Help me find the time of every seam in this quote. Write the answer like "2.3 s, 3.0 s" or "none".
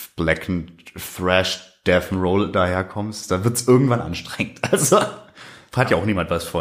none